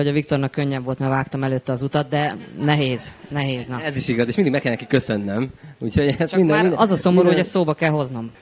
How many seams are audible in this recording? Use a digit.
0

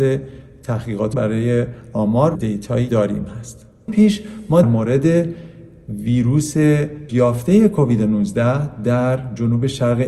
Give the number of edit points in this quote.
6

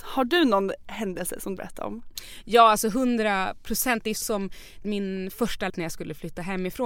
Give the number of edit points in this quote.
4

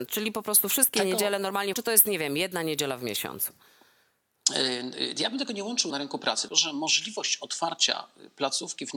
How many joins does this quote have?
3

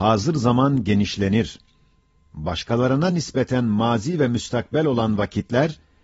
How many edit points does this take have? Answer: 0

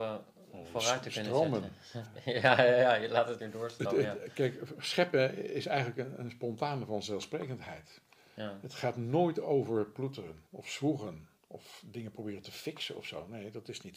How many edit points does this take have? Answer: 3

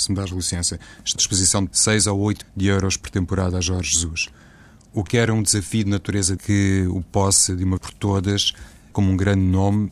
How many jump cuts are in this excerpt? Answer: 7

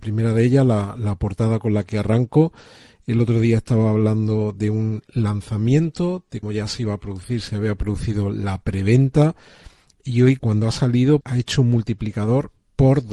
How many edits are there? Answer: 3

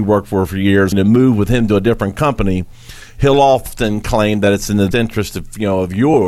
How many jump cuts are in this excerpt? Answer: 2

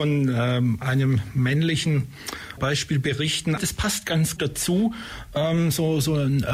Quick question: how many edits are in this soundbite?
3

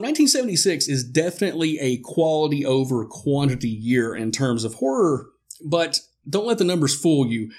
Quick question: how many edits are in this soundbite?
0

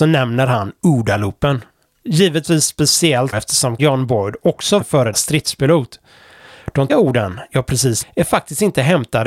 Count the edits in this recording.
6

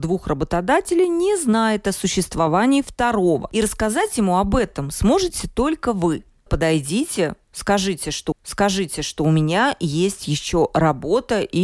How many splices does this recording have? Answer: 2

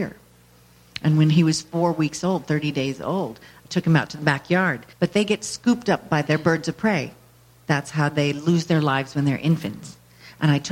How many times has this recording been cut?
1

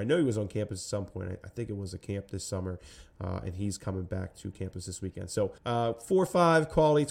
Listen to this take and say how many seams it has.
1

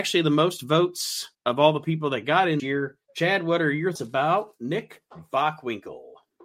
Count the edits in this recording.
4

